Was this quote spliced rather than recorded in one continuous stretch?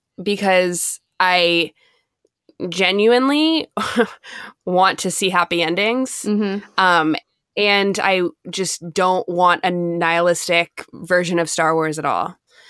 no; 0 cuts

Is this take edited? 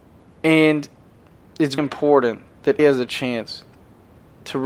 yes; 2 cuts; at 1.8 s, 2.8 s

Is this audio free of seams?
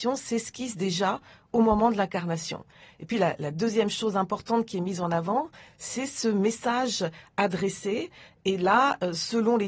yes; 0 cuts

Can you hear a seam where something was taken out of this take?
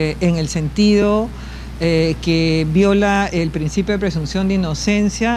no; 0 cuts

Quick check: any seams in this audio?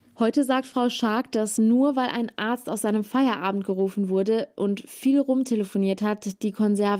no; 0 cuts

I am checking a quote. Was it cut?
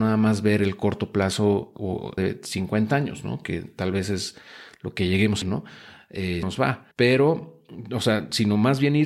yes; 4 cuts; at 2.2 s, 5.4 s, 6.4 s, 6.9 s

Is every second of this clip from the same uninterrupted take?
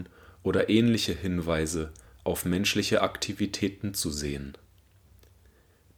yes; 0 cuts

